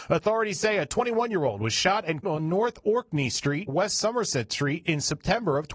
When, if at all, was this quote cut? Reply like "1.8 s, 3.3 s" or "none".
2.2 s, 3.7 s